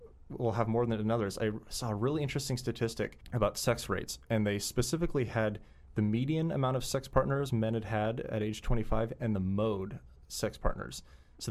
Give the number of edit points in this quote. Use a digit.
0